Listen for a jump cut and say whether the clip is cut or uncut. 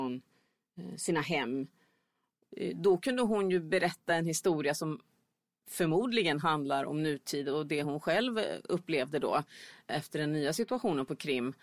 uncut